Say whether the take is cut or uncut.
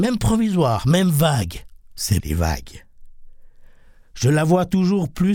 cut